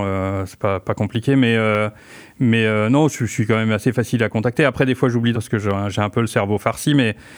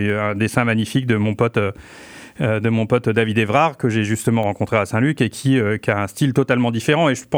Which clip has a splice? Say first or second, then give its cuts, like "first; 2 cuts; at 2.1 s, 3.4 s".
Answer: first; 1 cut; at 5.3 s